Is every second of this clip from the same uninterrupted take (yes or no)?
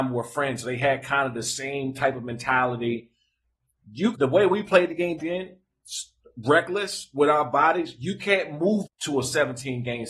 no